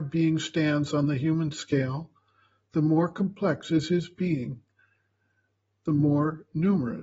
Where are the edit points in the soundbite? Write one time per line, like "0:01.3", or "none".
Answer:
none